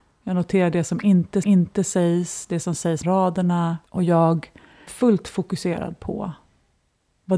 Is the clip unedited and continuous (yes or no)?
no